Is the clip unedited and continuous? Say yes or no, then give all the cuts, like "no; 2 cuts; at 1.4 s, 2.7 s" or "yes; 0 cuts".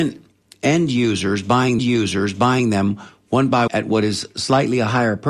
no; 2 cuts; at 1.8 s, 3.7 s